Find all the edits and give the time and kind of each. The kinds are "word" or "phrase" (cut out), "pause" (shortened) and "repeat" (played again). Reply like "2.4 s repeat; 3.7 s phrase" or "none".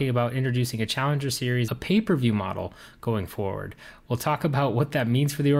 1.7 s phrase